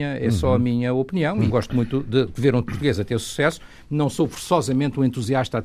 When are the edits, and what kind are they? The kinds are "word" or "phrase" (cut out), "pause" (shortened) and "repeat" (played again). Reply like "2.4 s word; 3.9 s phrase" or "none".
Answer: 1.5 s word